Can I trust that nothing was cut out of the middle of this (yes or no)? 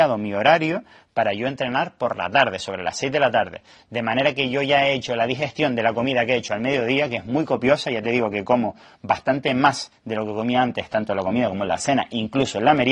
yes